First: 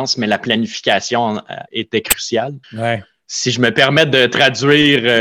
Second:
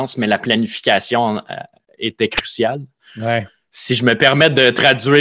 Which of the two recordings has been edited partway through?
first; 2 cuts; at 1.7 s, 2.6 s

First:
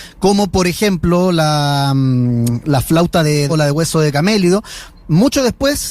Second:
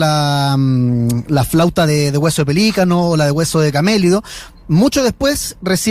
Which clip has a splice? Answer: first; 1 cut; at 3.5 s

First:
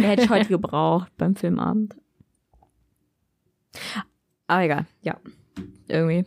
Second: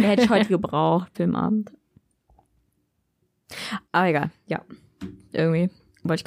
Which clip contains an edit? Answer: second; 2 cuts; at 1.1 s, 3.8 s

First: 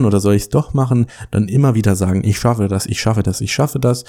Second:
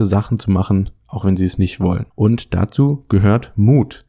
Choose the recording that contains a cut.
second; 1 cut; at 2.1 s

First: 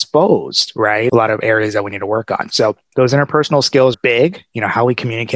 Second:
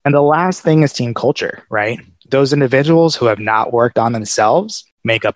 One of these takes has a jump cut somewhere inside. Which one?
first; 1 cut; at 3.9 s

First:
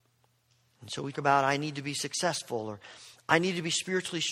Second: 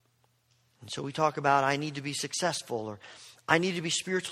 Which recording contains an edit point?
first; 1 cut; at 1.1 s

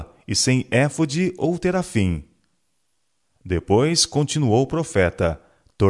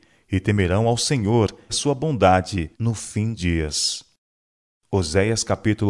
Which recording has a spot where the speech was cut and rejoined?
second; 3 cuts; at 1.7 s, 2.7 s, 3.3 s

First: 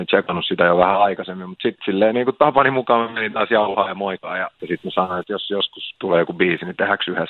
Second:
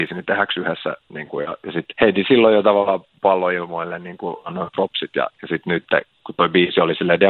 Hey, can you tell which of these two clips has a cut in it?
second; 1 cut; at 5.3 s

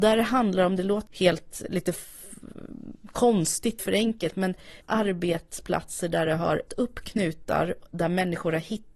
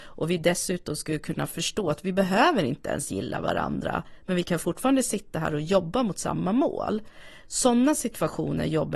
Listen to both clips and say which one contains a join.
first; 5 cuts; at 1.1 s, 1.7 s, 3.8 s, 4.8 s, 6.7 s

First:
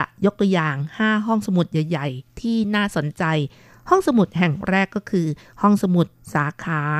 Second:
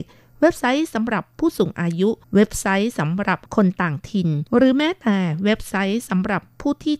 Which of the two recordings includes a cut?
second; 3 cuts; at 2.2 s, 3.5 s, 4.5 s

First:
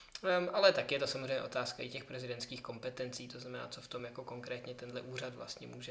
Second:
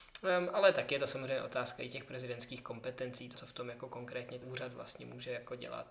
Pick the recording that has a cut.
second; 2 cuts; at 3.3 s, 4.4 s

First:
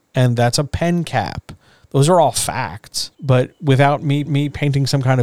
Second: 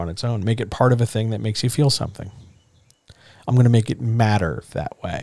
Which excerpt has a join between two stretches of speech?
first; 2 cuts; at 3.1 s, 4.3 s

